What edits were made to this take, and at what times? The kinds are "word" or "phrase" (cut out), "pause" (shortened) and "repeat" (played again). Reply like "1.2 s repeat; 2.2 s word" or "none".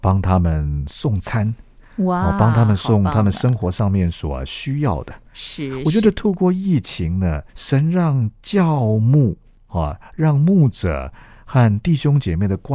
7.5 s pause